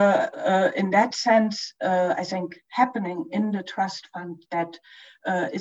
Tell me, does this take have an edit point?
no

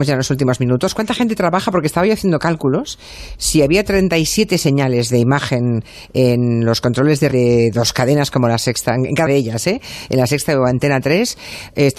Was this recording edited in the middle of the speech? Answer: yes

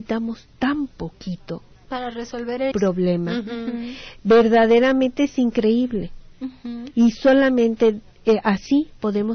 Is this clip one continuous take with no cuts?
no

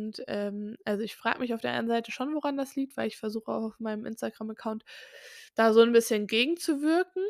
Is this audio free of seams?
no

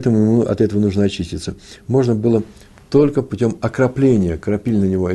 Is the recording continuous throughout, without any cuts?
yes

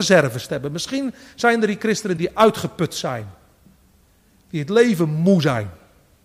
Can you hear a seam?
no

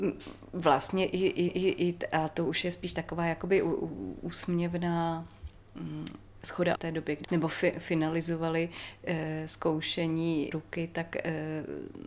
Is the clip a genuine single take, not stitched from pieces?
no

